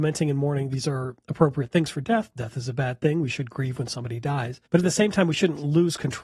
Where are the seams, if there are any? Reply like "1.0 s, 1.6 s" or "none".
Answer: 4.7 s